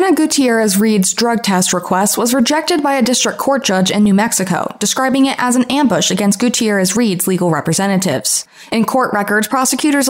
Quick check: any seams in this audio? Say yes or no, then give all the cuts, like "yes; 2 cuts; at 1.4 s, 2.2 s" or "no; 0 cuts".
no; 0 cuts